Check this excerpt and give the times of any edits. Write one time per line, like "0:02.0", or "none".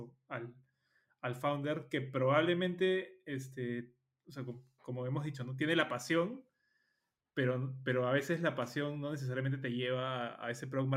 none